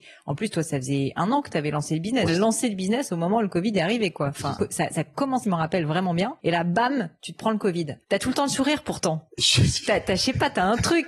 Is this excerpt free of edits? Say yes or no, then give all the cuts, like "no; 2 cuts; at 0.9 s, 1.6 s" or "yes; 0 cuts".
no; 6 cuts; at 2.3 s, 4.6 s, 5.4 s, 6.4 s, 8.0 s, 9.9 s